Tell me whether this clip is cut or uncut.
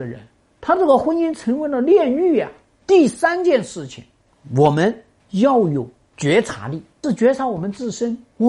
uncut